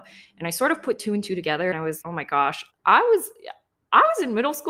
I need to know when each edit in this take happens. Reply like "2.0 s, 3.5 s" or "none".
1.7 s, 2.0 s, 2.7 s